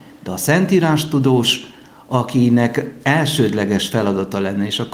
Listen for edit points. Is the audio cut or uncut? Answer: uncut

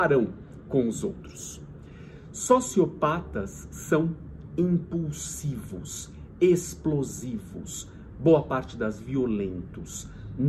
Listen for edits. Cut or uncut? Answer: cut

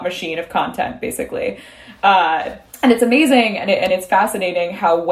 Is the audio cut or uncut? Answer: uncut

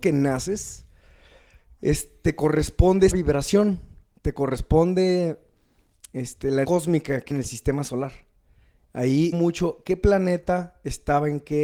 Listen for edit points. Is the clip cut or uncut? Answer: cut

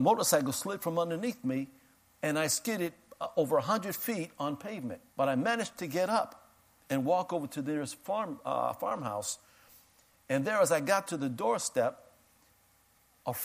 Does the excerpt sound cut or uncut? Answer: cut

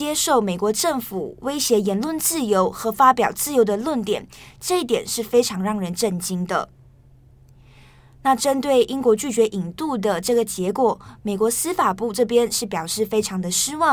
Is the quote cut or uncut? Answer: uncut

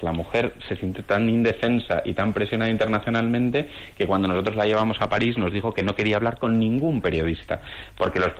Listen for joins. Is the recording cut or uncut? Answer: uncut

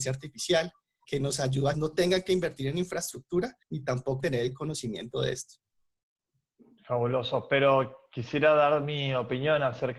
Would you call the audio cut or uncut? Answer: cut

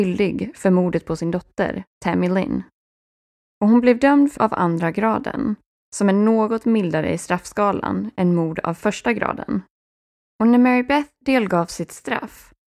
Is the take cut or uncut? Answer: cut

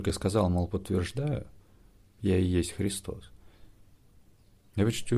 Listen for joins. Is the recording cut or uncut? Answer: uncut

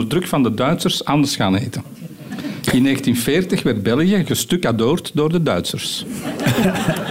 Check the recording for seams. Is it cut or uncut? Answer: uncut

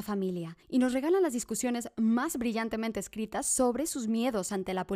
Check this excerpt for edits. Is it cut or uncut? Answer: uncut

